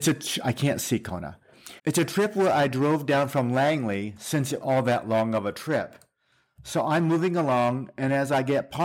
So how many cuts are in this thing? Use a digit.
2